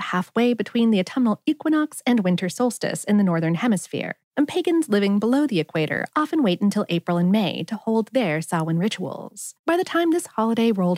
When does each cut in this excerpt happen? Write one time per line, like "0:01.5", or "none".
0:04.2
0:09.6